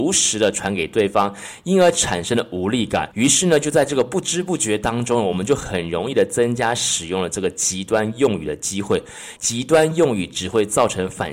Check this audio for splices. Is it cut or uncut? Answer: cut